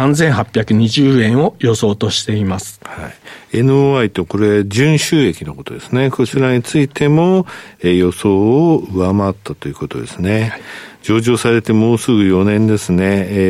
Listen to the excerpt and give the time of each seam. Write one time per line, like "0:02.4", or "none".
none